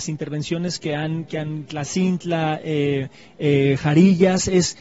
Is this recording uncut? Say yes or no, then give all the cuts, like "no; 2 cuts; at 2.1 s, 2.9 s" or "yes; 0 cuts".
yes; 0 cuts